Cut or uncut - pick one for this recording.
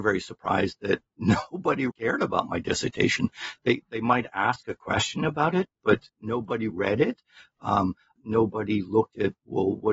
cut